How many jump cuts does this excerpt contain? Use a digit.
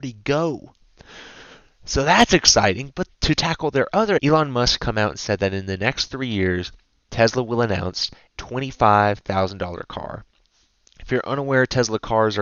4